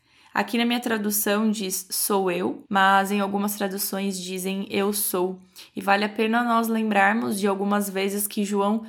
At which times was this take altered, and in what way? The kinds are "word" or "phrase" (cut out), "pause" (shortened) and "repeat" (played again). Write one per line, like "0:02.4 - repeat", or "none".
0:02.6 - pause